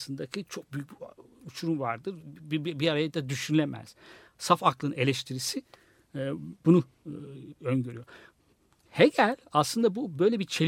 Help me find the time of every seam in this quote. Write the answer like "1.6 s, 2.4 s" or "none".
none